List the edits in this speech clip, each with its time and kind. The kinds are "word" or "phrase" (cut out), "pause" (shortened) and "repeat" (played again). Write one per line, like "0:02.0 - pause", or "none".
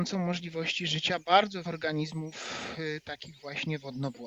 0:01.6 - word